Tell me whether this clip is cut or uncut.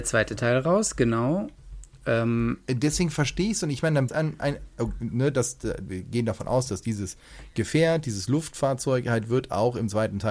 cut